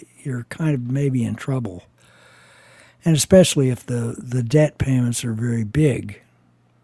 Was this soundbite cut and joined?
no; 0 cuts

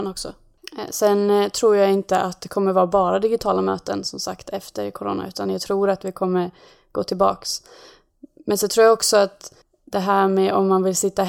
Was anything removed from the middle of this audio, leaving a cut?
yes; 1 cut; at 9.6 s

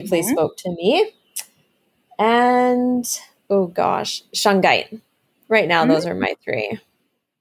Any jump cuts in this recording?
no; 0 cuts

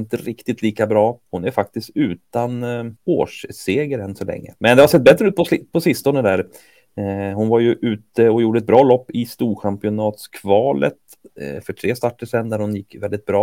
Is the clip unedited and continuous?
no; 3 cuts; at 1.3 s, 3.0 s, 4.6 s

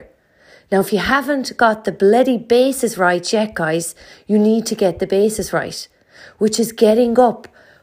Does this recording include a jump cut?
no; 0 cuts

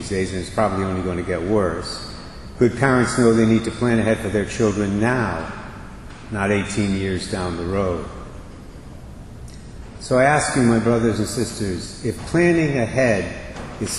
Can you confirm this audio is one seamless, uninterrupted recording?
yes; 0 cuts

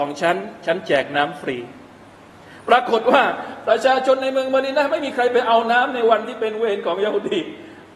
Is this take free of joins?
yes; 0 cuts

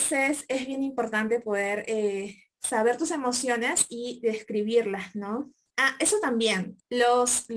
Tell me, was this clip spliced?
no; 0 cuts

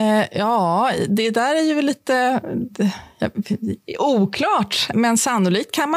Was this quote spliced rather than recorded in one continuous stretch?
yes; 1 cut; at 4.9 s

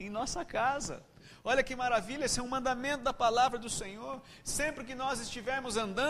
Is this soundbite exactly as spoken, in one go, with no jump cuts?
yes; 0 cuts

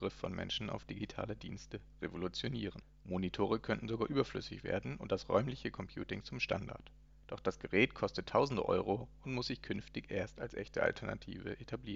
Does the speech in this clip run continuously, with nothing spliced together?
yes; 0 cuts

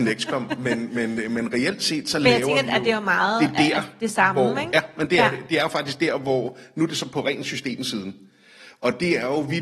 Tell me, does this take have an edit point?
no; 0 cuts

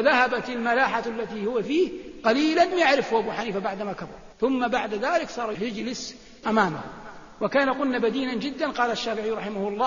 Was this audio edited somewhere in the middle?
yes; 5 cuts; at 1.6 s, 2.7 s, 4.3 s, 5.5 s, 6.4 s

